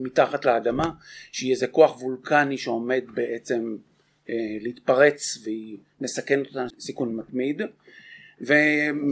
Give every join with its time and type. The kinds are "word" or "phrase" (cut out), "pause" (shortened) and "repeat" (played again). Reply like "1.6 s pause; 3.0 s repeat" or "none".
6.7 s word